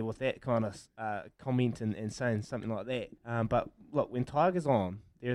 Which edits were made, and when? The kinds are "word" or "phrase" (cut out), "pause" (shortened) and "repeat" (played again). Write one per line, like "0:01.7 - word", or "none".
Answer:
0:03.2 - pause